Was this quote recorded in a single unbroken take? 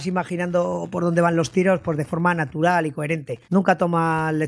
no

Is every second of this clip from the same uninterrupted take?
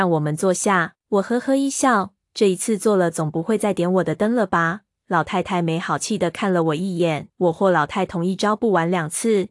no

